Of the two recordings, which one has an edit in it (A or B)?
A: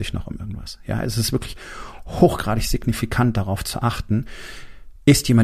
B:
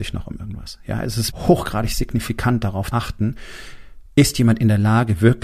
B